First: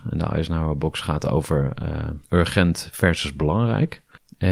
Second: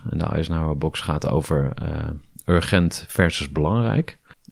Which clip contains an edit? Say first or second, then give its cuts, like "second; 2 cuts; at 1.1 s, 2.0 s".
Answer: first; 1 cut; at 2.2 s